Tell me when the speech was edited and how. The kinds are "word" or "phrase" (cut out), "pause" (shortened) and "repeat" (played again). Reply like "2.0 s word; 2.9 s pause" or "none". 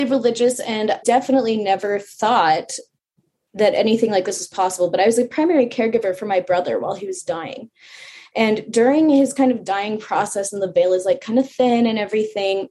1.0 s word